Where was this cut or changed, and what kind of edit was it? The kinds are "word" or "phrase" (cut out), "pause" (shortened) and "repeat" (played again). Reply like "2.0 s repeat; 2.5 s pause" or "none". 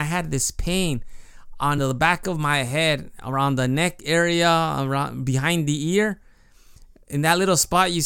none